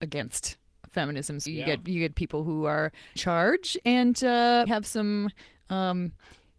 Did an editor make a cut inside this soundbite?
yes; 3 cuts; at 1.5 s, 3.2 s, 4.7 s

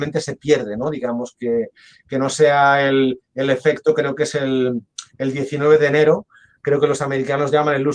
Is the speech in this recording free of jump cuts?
yes; 0 cuts

